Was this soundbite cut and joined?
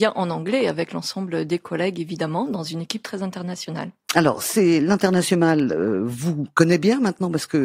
no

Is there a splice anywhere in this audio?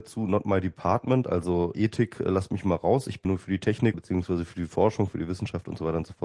yes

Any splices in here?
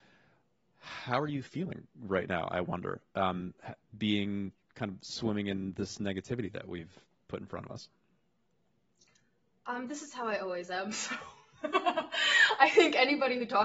no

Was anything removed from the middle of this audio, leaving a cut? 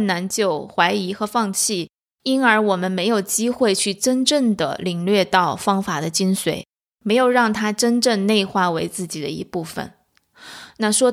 no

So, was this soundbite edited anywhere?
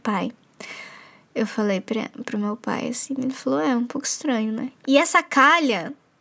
no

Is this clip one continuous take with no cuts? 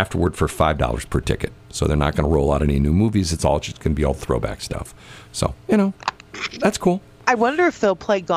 yes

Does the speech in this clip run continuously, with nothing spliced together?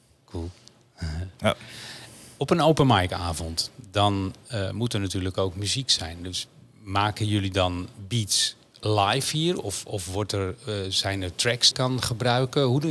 no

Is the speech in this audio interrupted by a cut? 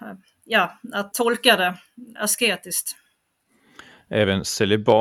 yes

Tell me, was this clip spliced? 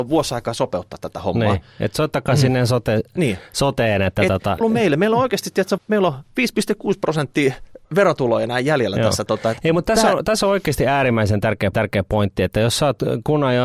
yes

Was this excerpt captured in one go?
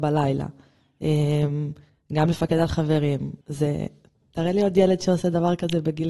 no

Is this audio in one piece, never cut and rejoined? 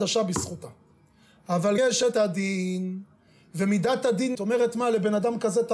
no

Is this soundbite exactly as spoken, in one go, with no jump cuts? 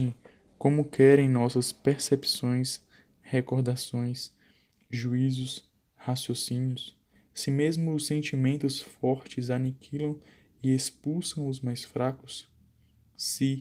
yes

